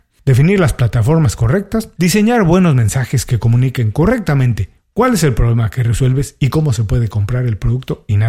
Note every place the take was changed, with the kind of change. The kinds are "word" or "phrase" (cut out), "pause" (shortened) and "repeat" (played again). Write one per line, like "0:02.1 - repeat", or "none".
none